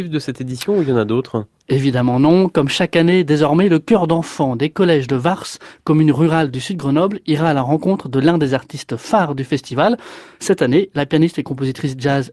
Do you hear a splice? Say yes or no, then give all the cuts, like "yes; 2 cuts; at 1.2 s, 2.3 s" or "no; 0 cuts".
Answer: no; 0 cuts